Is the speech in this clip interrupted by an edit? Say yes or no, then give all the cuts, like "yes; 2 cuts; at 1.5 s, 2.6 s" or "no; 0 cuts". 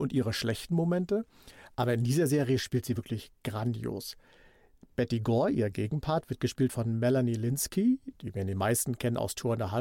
no; 0 cuts